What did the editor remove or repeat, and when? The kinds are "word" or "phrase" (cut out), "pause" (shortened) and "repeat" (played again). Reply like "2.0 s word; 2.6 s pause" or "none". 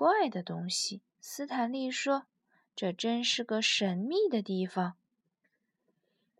1.1 s pause

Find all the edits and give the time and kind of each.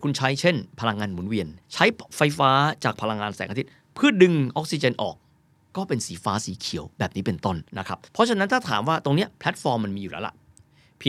1.6 s pause; 7.7 s pause; 8.1 s pause

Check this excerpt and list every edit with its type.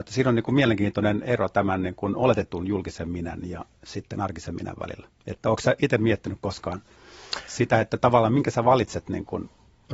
5.2 s pause

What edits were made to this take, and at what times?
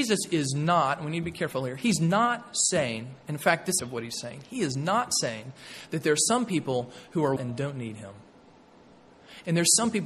3.8 s phrase; 7.4 s word

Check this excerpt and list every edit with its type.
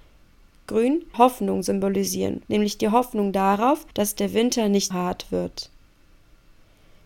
1.1 s word; 2.5 s pause; 3.9 s pause; 4.9 s word

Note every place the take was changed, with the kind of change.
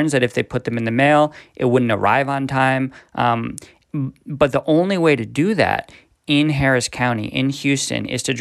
none

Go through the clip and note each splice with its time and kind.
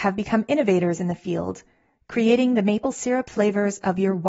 none

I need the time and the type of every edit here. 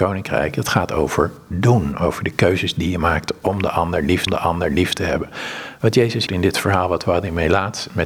4.3 s repeat; 6.3 s phrase

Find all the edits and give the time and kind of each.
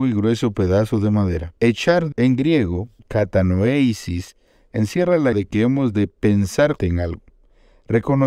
1.6 s pause; 2.1 s word; 3.0 s pause; 5.3 s word; 6.8 s word

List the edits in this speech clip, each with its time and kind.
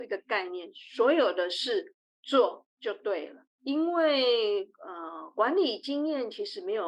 2.7 s pause

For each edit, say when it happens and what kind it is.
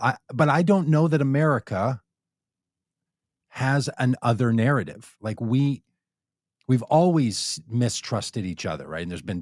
none

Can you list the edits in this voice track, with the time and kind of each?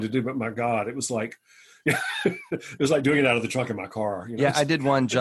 none

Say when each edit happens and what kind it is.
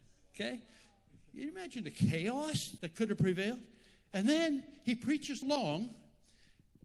2.8 s word; 5.4 s word

